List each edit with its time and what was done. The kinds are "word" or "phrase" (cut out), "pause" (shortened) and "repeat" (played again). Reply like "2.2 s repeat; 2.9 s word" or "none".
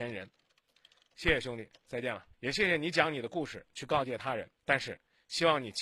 2.3 s pause; 4.6 s pause